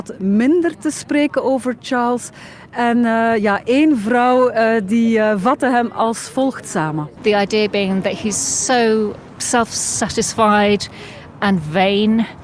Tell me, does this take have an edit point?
no; 0 cuts

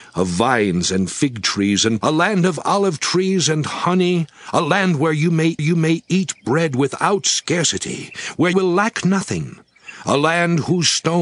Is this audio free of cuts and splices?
no; 3 cuts; at 2.0 s, 5.6 s, 8.5 s

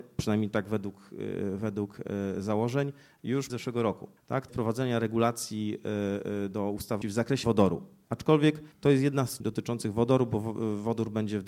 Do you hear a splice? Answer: yes; 7 cuts; at 3.5 s, 4.2 s, 4.5 s, 7.0 s, 7.4 s, 8.7 s, 9.4 s

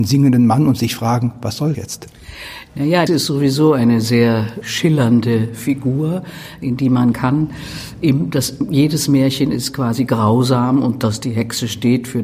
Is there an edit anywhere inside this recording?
yes; 4 cuts; at 1.7 s, 3.1 s, 4.6 s, 7.1 s

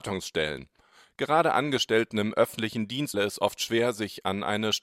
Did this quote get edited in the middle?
yes; 1 cut; at 3.1 s

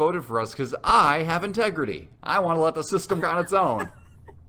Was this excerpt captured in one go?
no; 1 cut; at 3.2 s

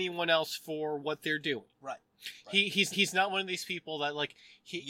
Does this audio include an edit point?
yes; 2 cuts; at 1.7 s, 2.9 s

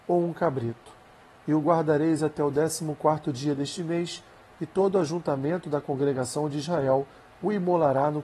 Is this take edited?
no; 0 cuts

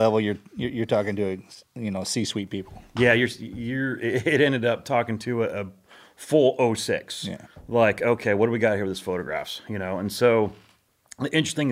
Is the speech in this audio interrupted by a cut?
no; 0 cuts

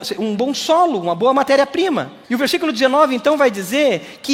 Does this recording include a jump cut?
yes; 1 cut; at 2.2 s

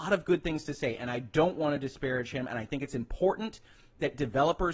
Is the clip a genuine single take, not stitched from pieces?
yes; 0 cuts

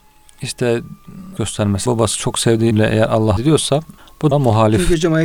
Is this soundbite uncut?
no; 6 cuts; at 1.4 s, 1.9 s, 2.7 s, 3.4 s, 4.0 s, 4.3 s

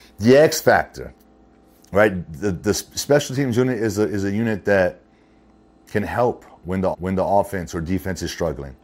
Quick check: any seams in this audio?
yes; 1 cut; at 6.9 s

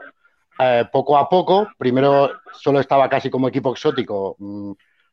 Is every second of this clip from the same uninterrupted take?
yes; 0 cuts

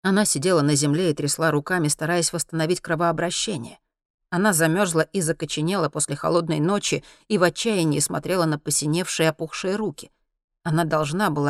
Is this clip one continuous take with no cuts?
yes; 0 cuts

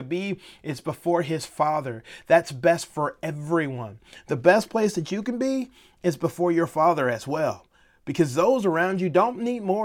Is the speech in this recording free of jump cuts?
yes; 0 cuts

